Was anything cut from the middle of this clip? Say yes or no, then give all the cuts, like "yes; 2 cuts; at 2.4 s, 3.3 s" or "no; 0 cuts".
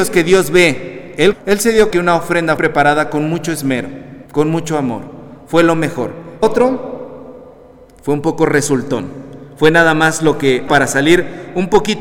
yes; 6 cuts; at 1.3 s, 1.9 s, 2.6 s, 4.3 s, 6.4 s, 10.7 s